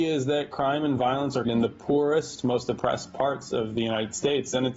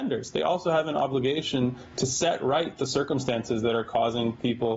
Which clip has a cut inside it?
first; 1 cut; at 1.4 s

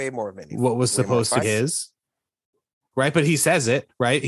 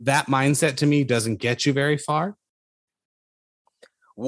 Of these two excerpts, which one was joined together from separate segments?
first; 1 cut; at 1.4 s

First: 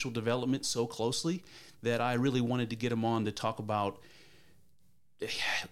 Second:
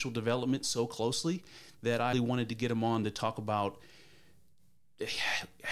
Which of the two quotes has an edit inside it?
second; 1 cut; at 2.1 s

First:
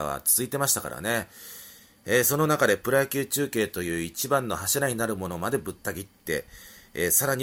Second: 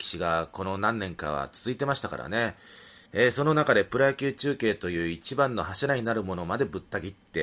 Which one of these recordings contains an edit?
second; 1 cut; at 3.1 s

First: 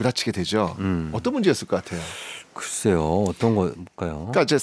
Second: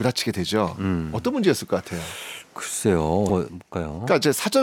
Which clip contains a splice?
second; 1 cut; at 3.3 s

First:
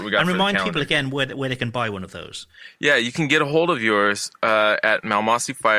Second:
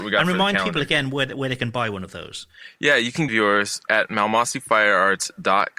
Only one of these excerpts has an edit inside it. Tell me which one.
second; 2 cuts; at 3.3 s, 3.9 s

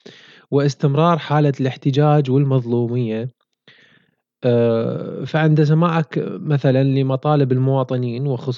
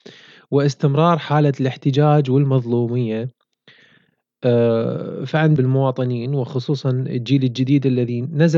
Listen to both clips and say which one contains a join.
second; 1 cut; at 5.6 s

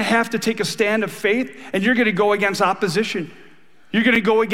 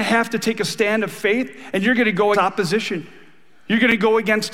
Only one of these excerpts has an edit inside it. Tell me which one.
second; 1 cut; at 2.3 s

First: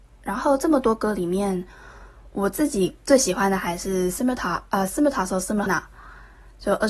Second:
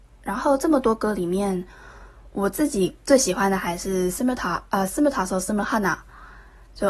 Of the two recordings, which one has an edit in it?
first; 1 cut; at 5.7 s

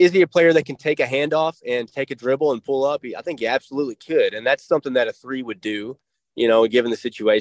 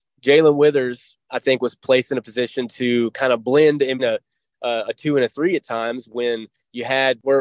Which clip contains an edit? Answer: second; 1 cut; at 4.0 s

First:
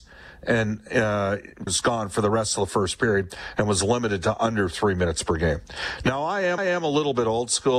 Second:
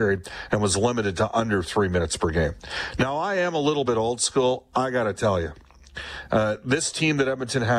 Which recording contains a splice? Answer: first; 2 cuts; at 1.7 s, 6.6 s

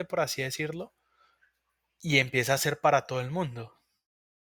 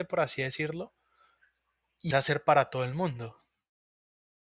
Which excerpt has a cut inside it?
second; 1 cut; at 2.1 s

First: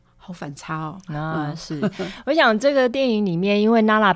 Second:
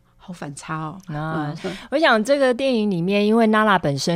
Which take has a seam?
second; 1 cut; at 1.6 s

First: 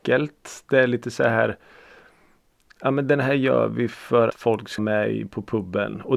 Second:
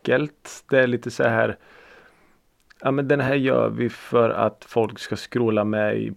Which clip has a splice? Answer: first; 2 cuts; at 4.3 s, 4.8 s

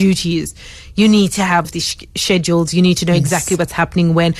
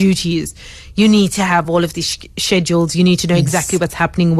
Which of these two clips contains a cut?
first; 1 cut; at 1.6 s

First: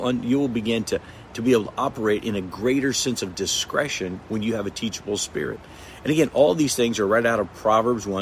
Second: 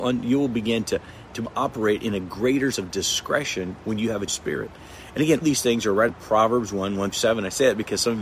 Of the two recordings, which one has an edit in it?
second; 6 cuts; at 1.4 s, 2.7 s, 4.3 s, 5.4 s, 6.1 s, 7.1 s

